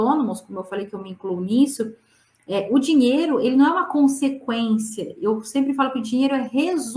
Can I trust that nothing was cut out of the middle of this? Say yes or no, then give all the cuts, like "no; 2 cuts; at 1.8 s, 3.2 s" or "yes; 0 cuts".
yes; 0 cuts